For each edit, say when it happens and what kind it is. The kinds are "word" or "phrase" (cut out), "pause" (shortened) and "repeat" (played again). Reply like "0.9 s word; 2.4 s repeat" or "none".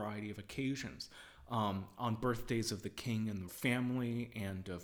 3.5 s word